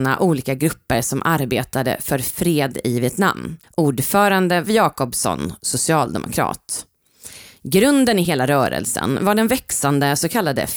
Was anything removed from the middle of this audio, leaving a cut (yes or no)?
yes